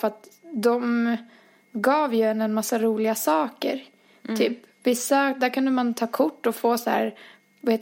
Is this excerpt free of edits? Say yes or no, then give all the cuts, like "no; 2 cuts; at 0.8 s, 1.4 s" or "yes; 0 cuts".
yes; 0 cuts